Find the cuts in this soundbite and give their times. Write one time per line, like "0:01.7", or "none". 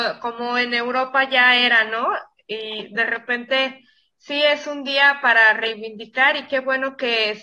none